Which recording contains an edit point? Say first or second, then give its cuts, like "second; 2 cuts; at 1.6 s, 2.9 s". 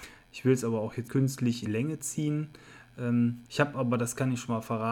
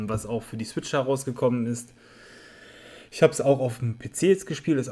first; 3 cuts; at 1.1 s, 1.7 s, 3.5 s